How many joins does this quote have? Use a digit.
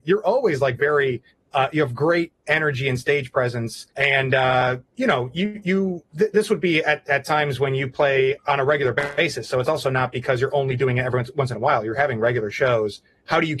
4